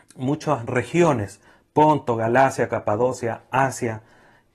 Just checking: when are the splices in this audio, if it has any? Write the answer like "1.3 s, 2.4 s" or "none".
none